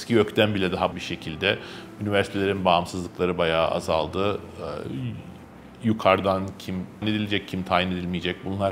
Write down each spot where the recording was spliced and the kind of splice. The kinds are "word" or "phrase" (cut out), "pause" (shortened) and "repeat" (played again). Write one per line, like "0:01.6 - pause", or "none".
0:00.9 - word
0:07.0 - word